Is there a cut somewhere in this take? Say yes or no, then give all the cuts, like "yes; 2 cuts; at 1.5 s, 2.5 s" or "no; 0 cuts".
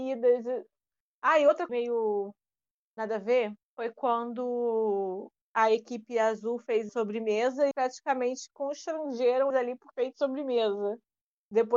yes; 7 cuts; at 1.7 s, 3.6 s, 5.4 s, 6.9 s, 7.7 s, 9.5 s, 9.9 s